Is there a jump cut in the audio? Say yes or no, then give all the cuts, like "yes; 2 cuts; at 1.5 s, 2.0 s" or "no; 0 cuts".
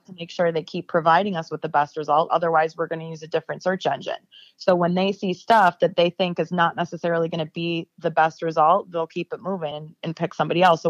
no; 0 cuts